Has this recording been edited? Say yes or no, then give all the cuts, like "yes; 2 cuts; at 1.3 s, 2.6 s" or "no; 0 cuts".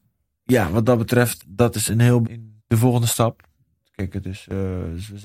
yes; 4 cuts; at 1.4 s, 1.9 s, 2.2 s, 2.6 s